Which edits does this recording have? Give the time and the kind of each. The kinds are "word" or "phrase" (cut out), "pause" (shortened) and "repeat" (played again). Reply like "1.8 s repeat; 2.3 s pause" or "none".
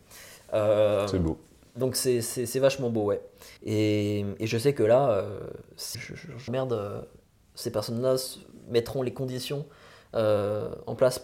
3.6 s pause; 5.9 s word; 6.5 s phrase